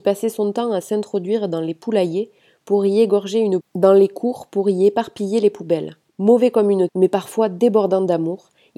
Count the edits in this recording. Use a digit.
3